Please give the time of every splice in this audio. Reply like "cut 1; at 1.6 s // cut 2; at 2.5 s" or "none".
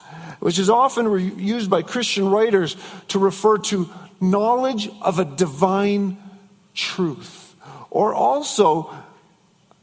none